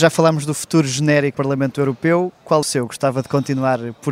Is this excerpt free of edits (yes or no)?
no